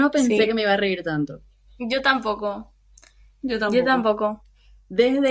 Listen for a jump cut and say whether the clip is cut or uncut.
uncut